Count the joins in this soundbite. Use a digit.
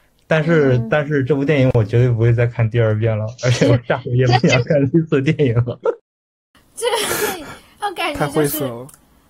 0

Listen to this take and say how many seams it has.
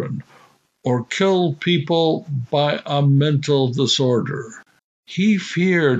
1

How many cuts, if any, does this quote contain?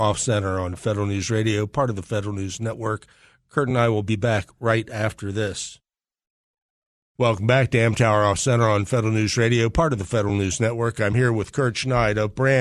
0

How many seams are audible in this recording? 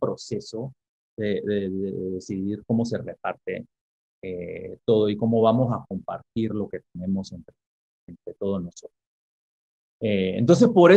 0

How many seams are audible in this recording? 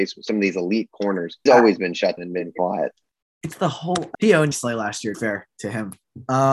5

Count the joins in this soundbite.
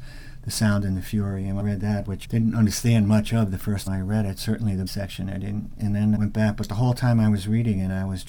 5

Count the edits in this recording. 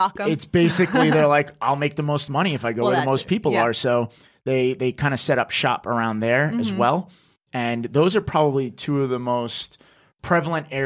0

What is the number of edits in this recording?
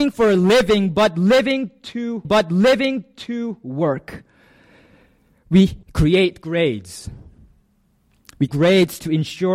3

